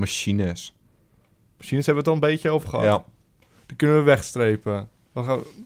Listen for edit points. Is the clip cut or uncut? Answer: uncut